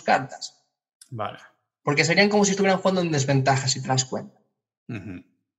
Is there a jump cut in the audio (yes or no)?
no